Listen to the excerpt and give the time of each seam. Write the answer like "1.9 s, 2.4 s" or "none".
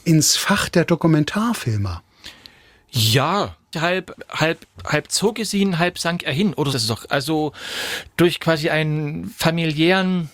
3.7 s, 4.7 s, 6.7 s